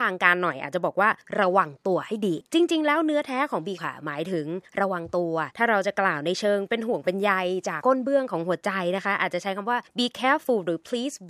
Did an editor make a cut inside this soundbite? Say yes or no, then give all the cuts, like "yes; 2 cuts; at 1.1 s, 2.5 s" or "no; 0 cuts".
yes; 1 cut; at 3.8 s